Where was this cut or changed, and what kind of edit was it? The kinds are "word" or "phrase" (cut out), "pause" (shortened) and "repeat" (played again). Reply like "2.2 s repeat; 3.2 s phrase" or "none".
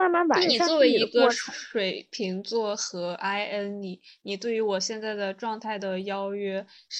none